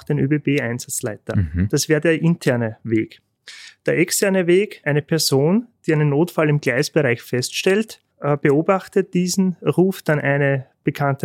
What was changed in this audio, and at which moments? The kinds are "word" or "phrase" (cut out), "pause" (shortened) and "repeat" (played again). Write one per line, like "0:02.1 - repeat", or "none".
0:08.1 - pause